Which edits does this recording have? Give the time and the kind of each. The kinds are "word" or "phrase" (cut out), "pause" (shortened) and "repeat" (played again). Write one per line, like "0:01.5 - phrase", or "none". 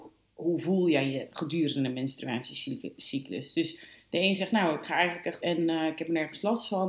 0:05.4 - word

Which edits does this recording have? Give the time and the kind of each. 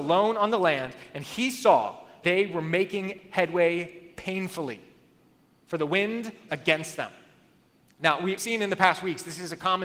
0:02.2 - word
0:06.5 - word
0:08.4 - word

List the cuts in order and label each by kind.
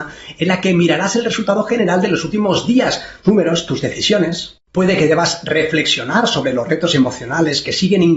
0:03.2 - word

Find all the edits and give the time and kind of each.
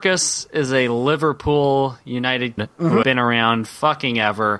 0:02.6 - phrase
0:03.0 - word
0:03.7 - word

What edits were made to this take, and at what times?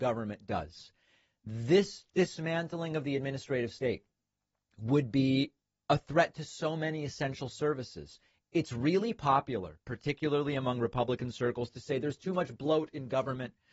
none

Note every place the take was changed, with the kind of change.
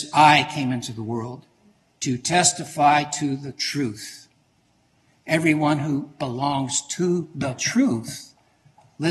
none

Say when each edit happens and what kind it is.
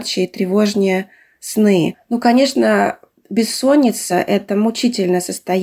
none

